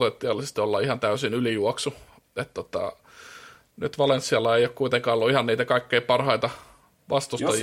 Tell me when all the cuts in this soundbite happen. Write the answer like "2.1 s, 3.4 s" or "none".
none